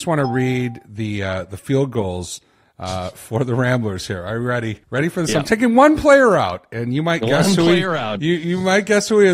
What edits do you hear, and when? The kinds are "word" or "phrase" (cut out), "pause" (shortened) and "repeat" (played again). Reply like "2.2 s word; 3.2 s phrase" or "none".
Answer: 4.8 s pause